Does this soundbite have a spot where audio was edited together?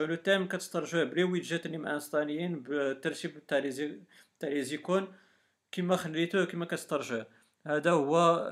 no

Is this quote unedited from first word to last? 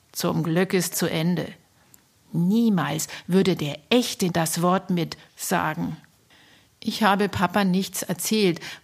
no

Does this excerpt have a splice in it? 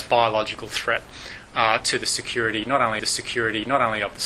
yes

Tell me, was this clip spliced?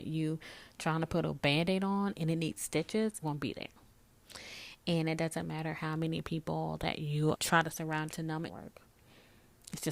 yes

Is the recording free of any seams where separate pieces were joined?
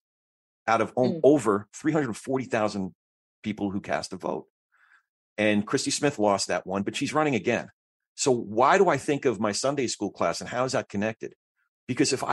yes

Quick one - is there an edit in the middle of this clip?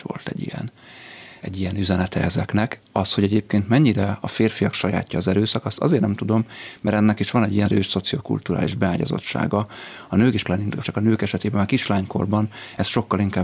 yes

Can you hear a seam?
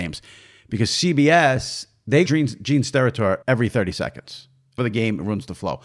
yes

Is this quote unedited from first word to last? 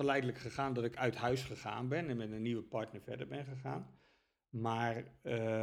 yes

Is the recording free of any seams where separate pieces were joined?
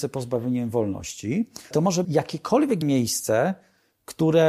no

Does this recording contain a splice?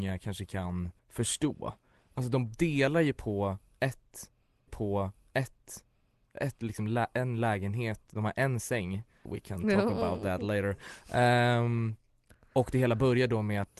yes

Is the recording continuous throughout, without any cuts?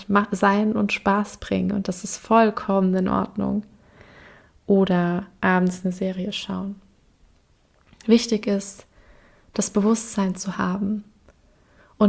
yes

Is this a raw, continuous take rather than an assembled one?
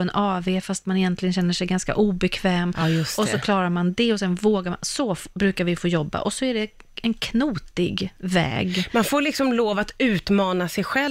yes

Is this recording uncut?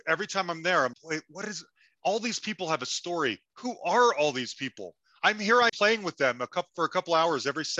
no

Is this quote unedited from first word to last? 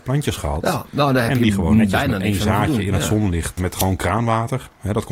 no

